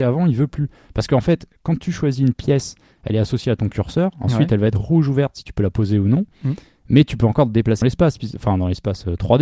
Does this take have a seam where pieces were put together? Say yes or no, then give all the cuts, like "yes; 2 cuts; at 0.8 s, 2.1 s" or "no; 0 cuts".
yes; 1 cut; at 7.8 s